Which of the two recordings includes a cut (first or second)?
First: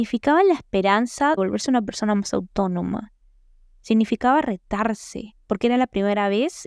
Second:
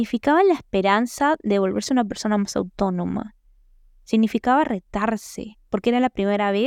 first